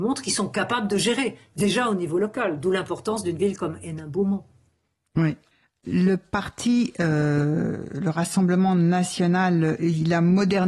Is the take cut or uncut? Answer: uncut